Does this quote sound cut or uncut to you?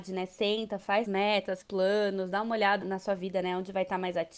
cut